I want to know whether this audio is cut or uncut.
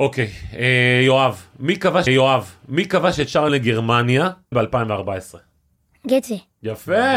cut